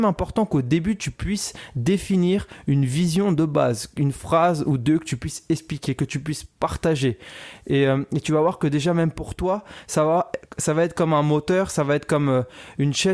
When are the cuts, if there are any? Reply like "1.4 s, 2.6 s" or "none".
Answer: none